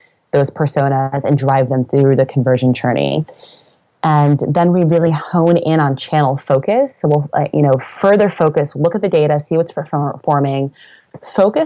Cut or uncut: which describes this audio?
uncut